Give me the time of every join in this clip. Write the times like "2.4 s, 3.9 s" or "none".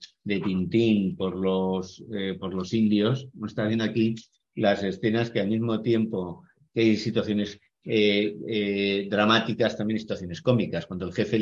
none